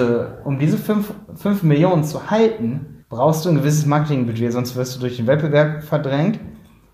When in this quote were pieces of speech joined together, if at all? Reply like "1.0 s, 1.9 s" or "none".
3.0 s